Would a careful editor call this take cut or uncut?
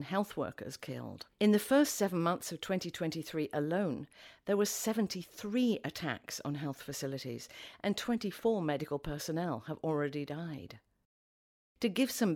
cut